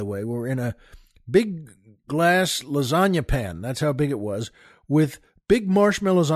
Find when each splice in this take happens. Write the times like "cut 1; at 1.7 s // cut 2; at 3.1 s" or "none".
none